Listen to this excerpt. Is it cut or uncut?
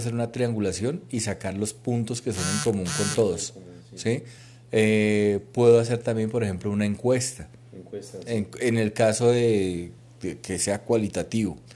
uncut